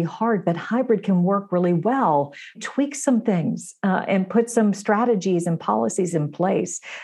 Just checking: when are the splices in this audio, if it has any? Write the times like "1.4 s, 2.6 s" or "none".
2.5 s